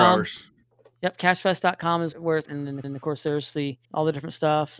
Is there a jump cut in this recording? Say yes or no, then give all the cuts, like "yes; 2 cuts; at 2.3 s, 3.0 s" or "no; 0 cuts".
yes; 4 cuts; at 2.1 s, 2.4 s, 2.8 s, 3.8 s